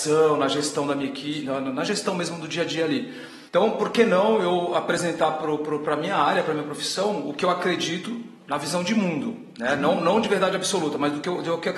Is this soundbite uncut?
no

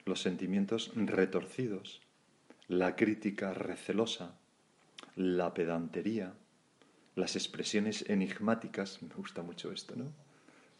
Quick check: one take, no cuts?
yes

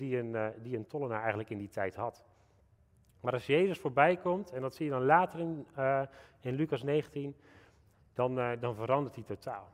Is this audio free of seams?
yes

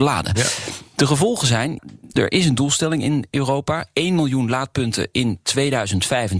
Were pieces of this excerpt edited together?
no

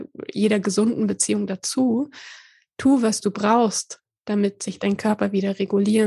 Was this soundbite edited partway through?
no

